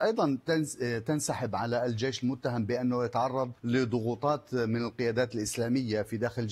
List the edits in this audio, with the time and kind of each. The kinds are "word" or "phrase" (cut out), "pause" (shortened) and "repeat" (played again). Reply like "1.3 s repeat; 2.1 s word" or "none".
3.6 s pause